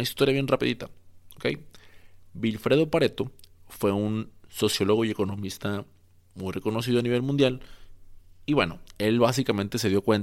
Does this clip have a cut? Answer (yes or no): no